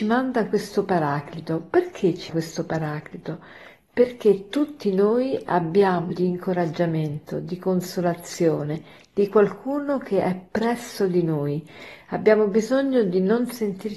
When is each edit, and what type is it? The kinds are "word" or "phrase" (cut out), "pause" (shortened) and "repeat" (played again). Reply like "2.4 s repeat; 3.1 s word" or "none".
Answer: 2.3 s word; 6.1 s word